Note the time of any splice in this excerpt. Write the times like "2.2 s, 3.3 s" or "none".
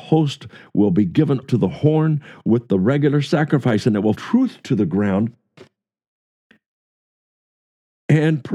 1.4 s, 4.1 s